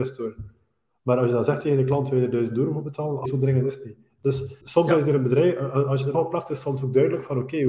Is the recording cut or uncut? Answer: cut